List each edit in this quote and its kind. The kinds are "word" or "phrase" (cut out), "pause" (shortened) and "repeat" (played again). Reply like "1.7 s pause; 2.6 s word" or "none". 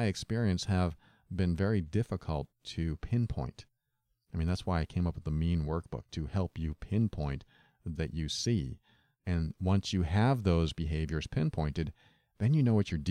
8.0 s phrase